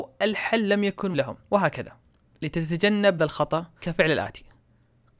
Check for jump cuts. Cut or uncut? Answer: cut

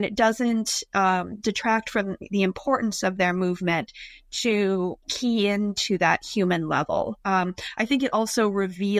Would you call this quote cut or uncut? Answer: cut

